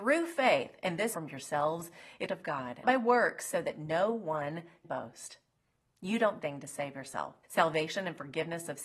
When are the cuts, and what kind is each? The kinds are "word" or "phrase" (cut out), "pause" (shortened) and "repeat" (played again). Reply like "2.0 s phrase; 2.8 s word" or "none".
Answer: 1.1 s phrase; 2.3 s phrase; 2.8 s word; 4.8 s word; 6.4 s phrase; 7.4 s pause

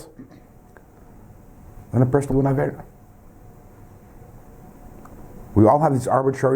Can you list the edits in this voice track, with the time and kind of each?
1.9 s pause; 2.3 s word

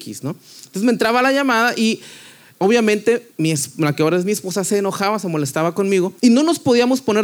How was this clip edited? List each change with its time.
3.3 s pause; 6.2 s pause

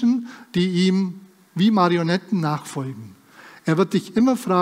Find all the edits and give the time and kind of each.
none

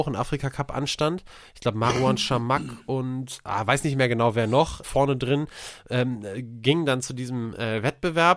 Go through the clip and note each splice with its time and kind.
4.8 s word

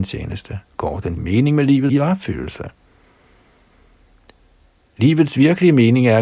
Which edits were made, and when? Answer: 1.2 s word; 1.9 s word

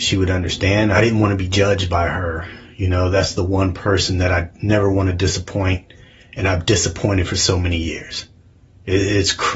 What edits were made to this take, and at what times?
none

